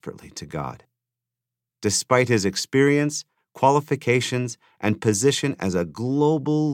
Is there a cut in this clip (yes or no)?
no